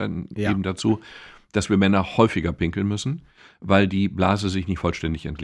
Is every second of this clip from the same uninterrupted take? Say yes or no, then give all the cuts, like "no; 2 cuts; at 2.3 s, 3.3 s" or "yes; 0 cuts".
yes; 0 cuts